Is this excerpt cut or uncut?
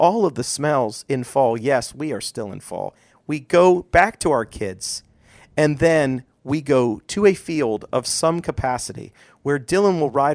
uncut